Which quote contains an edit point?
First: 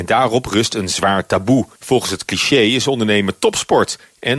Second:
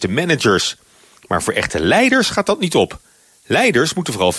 first; 1 cut; at 1.8 s

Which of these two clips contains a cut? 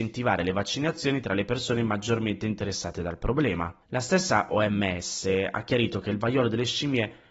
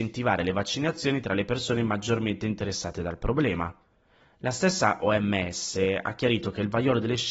first; 1 cut; at 3.8 s

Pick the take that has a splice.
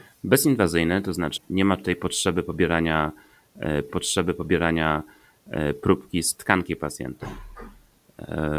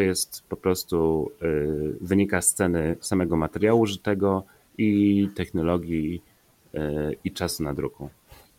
first; 2 cuts; at 1.4 s, 3.9 s

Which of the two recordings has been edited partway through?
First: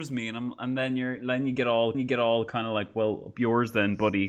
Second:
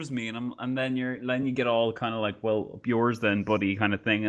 first; 1 cut; at 1.9 s

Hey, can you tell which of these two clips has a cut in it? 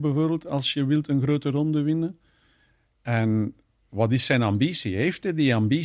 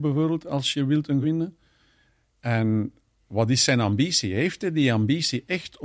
second; 1 cut; at 1.2 s

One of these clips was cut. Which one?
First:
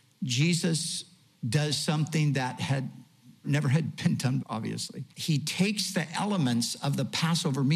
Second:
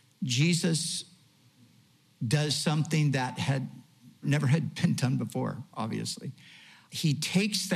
first; 3 cuts; at 1.3 s, 4.4 s, 5.1 s

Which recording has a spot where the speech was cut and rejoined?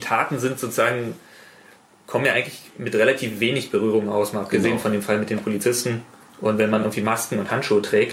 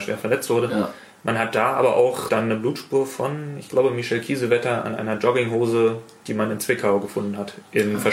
second; 1 cut; at 2.3 s

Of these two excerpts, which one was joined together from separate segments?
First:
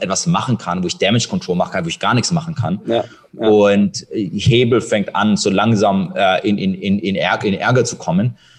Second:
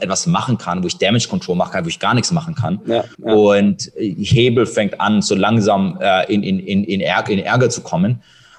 second; 1 cut; at 3.1 s

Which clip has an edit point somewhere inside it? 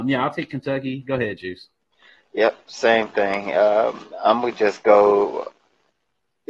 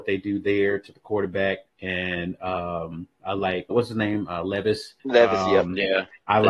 second; 4 cuts; at 0.9 s, 1.7 s, 3.7 s, 5.0 s

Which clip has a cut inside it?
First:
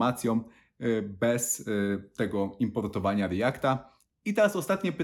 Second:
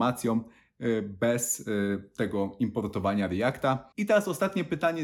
second; 1 cut; at 3.9 s

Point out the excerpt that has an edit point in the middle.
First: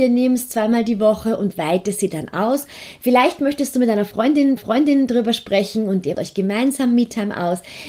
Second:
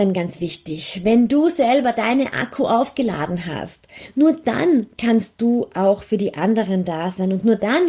first; 2 cuts; at 4.6 s, 6.1 s

